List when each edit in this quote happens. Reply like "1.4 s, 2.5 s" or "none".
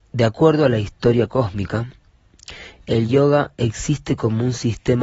none